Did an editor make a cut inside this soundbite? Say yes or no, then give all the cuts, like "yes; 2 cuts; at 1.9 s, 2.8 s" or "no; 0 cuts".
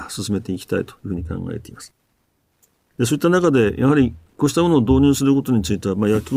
no; 0 cuts